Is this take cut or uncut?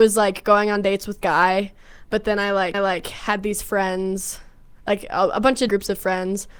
cut